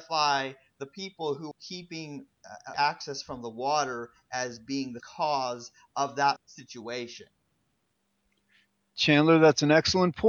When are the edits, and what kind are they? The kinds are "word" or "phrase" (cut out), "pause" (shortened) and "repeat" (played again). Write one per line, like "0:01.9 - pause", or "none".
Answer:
0:01.5 - word
0:02.7 - word
0:05.0 - word
0:06.4 - word